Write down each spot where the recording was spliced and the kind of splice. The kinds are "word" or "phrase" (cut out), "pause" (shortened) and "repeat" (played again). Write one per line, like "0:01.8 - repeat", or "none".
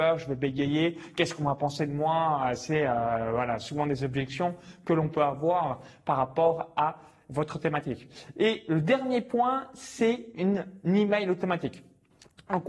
none